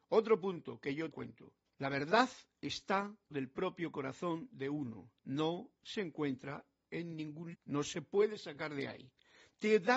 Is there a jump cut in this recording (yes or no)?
yes